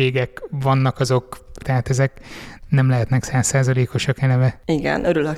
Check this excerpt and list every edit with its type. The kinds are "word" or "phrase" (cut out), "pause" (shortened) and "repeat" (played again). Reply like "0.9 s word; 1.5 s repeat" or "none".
1.6 s word